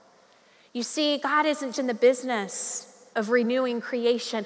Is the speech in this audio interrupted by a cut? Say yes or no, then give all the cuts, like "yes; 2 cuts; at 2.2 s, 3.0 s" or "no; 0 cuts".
yes; 2 cuts; at 1.7 s, 3.1 s